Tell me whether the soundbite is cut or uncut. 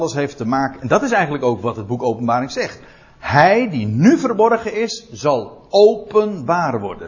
uncut